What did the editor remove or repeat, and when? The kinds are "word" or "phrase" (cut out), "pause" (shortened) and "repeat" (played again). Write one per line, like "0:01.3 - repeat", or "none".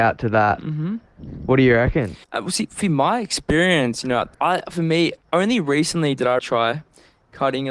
0:02.2 - pause
0:04.3 - pause
0:05.2 - pause
0:06.4 - word